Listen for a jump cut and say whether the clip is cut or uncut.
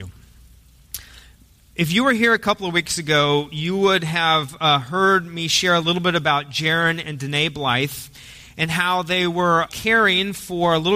cut